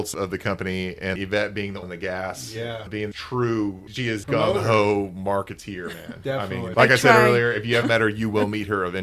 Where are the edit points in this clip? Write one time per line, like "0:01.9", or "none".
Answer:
0:01.2
0:01.8
0:03.1
0:04.2
0:06.7
0:07.8